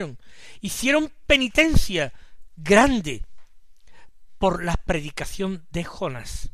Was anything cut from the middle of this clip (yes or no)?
no